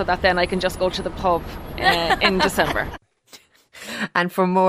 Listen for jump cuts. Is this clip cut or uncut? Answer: uncut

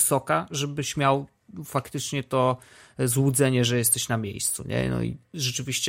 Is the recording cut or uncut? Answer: uncut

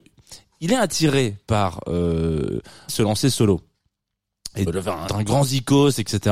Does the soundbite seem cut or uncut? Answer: cut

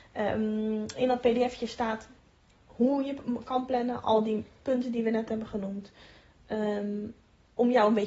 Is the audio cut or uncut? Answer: cut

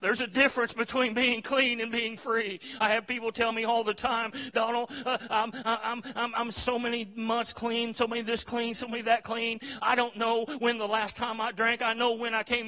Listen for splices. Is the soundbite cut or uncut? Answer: uncut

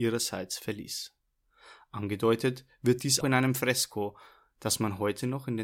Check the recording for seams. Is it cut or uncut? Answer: cut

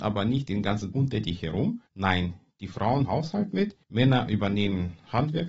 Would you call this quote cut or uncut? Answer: cut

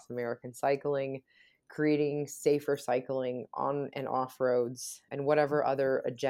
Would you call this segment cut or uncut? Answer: cut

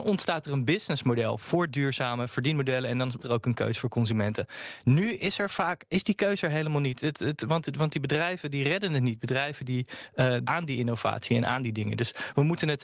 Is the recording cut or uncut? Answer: cut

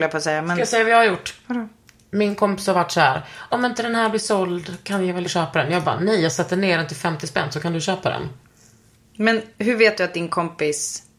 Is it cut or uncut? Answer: cut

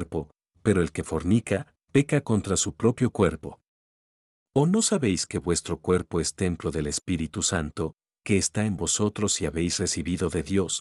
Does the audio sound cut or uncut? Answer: uncut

